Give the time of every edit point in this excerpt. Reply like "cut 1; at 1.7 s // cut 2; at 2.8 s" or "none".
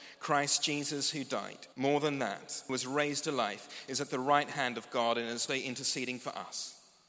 cut 1; at 1.7 s // cut 2; at 2.7 s // cut 3; at 5.5 s